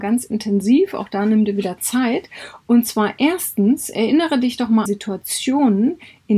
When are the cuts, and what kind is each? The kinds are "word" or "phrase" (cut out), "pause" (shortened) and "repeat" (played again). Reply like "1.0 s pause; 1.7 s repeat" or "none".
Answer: 4.9 s word